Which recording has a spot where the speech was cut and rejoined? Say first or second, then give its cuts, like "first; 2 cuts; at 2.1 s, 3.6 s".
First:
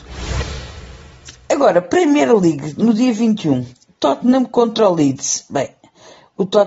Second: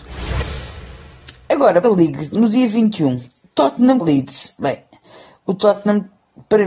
second; 2 cuts; at 1.8 s, 4.0 s